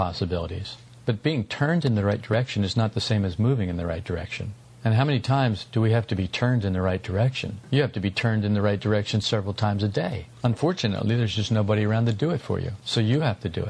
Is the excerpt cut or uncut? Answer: uncut